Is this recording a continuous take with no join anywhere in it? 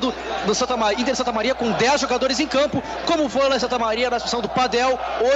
yes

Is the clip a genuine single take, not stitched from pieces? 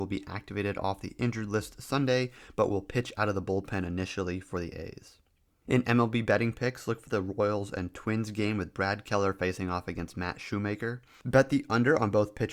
yes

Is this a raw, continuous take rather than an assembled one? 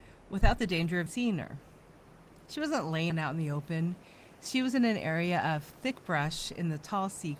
no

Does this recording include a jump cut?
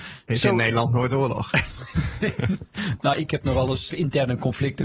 yes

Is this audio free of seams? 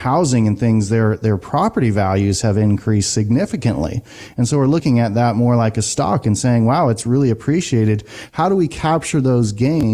yes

